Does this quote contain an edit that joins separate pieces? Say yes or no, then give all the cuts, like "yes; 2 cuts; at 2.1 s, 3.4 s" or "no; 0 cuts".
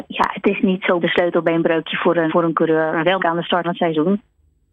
yes; 4 cuts; at 1.0 s, 2.3 s, 3.2 s, 3.6 s